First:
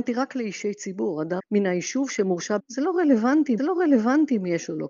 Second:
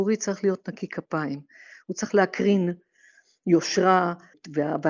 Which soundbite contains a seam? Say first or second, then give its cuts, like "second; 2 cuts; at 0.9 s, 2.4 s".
first; 3 cuts; at 1.4 s, 2.6 s, 3.6 s